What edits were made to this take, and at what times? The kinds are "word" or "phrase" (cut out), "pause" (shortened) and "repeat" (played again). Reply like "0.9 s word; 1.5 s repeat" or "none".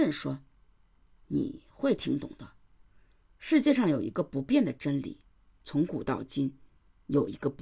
none